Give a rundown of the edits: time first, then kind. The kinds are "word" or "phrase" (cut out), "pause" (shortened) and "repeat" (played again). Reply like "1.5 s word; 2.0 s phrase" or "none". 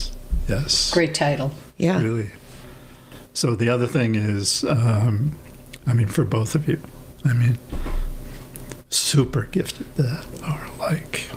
9.9 s word